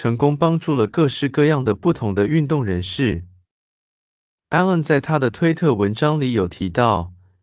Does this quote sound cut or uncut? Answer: uncut